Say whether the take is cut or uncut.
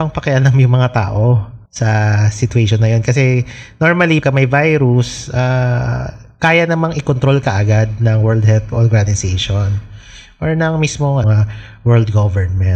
cut